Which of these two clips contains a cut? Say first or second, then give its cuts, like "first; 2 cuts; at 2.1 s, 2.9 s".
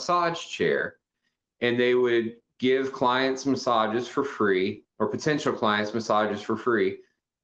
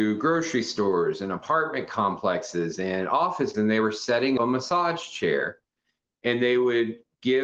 second; 2 cuts; at 3.5 s, 4.4 s